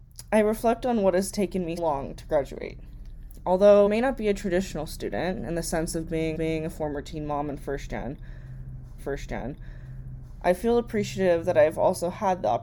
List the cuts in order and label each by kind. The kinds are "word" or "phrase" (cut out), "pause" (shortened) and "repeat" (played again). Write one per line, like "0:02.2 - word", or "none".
0:01.8 - word
0:03.9 - word
0:06.3 - repeat
0:09.0 - repeat